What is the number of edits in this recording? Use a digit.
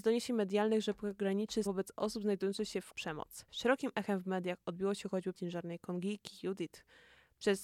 4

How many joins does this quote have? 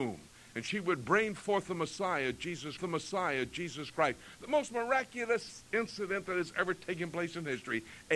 1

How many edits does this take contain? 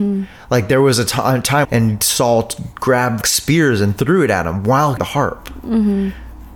3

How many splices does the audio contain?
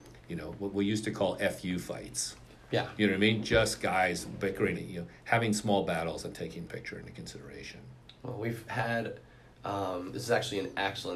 3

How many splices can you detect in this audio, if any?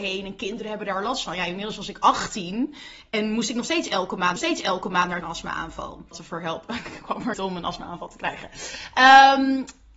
4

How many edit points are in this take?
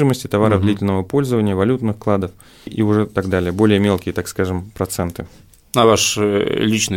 1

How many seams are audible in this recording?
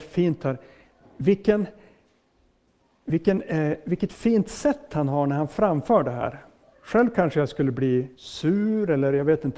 2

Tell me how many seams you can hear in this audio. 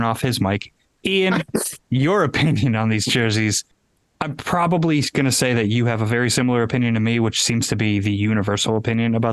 0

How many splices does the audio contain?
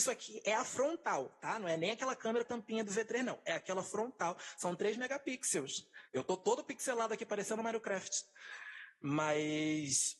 2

